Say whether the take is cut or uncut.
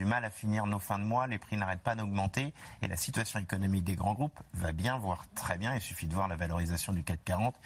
uncut